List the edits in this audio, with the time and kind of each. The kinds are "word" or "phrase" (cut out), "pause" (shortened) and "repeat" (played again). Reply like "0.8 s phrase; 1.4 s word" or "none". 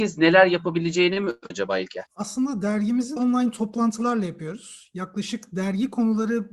1.5 s word; 2.1 s pause; 3.2 s phrase